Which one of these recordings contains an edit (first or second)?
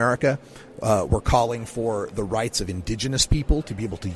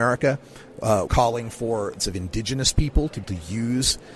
second